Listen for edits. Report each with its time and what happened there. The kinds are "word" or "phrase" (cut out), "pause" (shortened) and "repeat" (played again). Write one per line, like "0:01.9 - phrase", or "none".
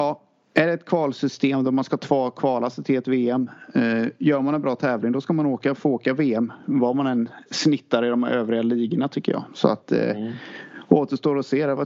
none

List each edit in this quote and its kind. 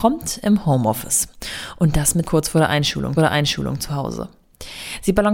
0:02.3 - word
0:03.2 - repeat

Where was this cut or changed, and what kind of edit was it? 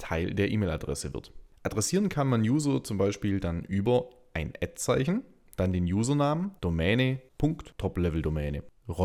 0:06.6 - word

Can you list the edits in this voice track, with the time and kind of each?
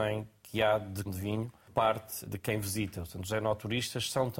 0:01.1 - word
0:01.7 - word
0:02.3 - word

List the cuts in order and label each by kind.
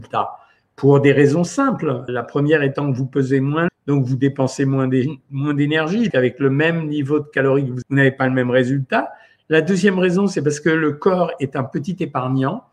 0:02.1 - word
0:03.7 - word
0:06.1 - word
0:07.8 - word

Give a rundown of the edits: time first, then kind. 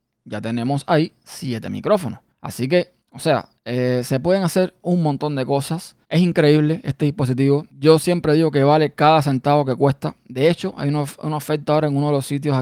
0:02.3 - pause
0:03.0 - pause
0:03.6 - pause
0:06.0 - pause
0:07.7 - pause

